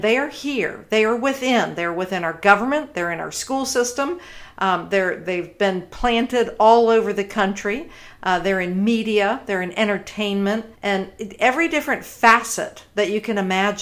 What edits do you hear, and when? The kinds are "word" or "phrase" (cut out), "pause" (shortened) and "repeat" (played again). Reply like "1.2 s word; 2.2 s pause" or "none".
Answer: 10.7 s pause